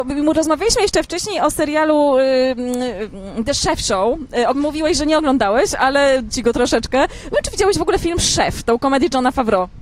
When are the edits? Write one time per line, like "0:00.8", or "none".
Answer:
0:04.5
0:06.3
0:07.3